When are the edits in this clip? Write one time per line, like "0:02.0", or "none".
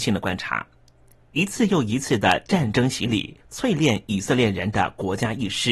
0:03.4